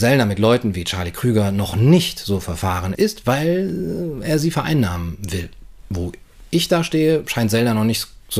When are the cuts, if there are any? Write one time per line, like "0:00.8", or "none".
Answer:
0:02.9
0:05.8